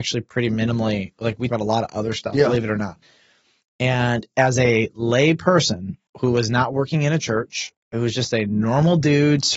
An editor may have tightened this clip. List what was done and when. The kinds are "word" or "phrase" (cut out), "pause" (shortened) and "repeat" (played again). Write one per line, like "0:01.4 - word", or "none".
0:01.5 - word